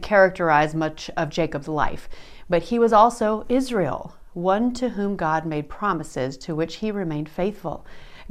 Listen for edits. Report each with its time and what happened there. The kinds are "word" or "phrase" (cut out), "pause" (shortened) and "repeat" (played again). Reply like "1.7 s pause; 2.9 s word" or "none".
none